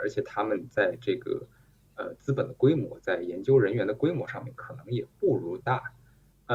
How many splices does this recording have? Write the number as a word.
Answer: one